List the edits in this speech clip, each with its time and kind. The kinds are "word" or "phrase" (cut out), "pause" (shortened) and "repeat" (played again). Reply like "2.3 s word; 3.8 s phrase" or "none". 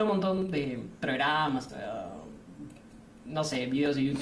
1.7 s word